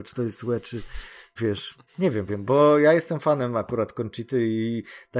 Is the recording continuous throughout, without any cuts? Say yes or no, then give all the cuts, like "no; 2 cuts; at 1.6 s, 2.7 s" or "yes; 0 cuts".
no; 3 cuts; at 1.4 s, 1.9 s, 2.3 s